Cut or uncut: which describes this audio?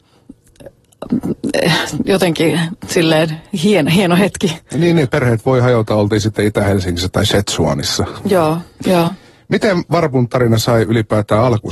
cut